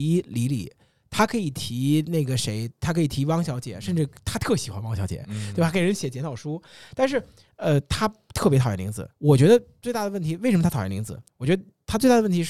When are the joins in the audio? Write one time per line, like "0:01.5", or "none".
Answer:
0:09.1
0:11.3